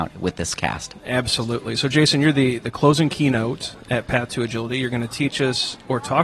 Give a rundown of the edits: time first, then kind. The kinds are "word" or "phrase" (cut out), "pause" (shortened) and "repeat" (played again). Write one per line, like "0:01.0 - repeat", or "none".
none